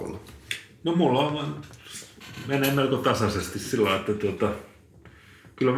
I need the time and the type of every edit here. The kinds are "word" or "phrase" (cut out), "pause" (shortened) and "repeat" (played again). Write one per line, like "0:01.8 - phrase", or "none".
none